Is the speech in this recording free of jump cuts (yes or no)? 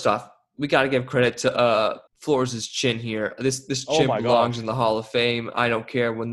no